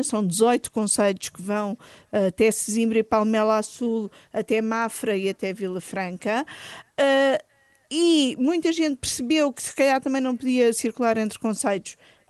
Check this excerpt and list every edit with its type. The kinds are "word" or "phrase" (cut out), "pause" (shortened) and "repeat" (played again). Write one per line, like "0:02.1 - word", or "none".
none